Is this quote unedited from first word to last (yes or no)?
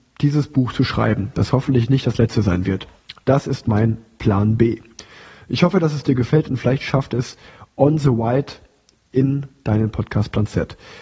yes